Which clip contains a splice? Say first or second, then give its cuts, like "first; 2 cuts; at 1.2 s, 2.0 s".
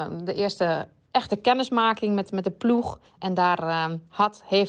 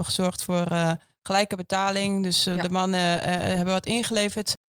first; 1 cut; at 3.1 s